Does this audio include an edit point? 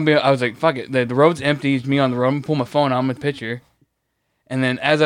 yes; 2 cuts; at 1.8 s, 3.2 s

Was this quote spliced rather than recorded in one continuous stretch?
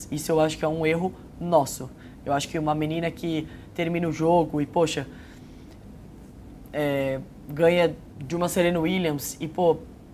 no; 0 cuts

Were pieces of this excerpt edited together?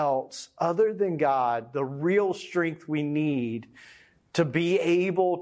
no; 0 cuts

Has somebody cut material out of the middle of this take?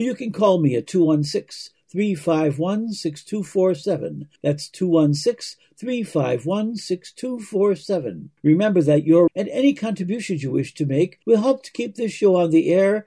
yes; 4 cuts; at 4.4 s, 8.4 s, 9.3 s, 11.2 s

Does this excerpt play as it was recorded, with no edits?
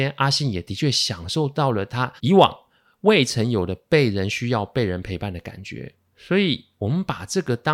no; 1 cut; at 2.2 s

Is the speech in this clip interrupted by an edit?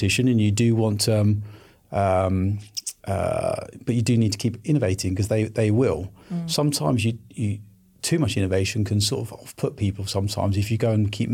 yes; 1 cut; at 3.0 s

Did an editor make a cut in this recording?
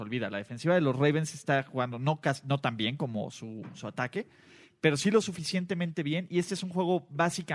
no; 0 cuts

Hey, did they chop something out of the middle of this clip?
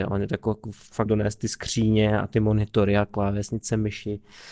yes; 1 cut; at 1.1 s

